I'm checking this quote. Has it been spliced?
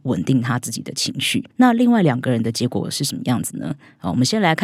yes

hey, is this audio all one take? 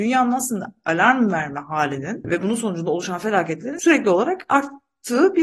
yes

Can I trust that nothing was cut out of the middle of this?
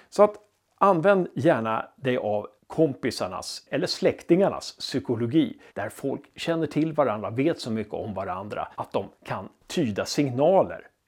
no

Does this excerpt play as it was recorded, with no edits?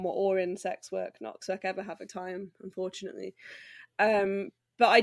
no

